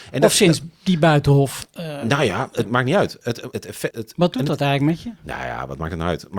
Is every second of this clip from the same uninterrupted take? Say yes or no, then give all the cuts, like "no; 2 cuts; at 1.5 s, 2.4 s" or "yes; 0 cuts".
no; 3 cuts; at 2.6 s, 3.5 s, 3.9 s